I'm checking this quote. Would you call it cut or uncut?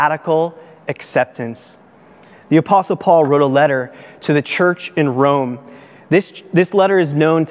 uncut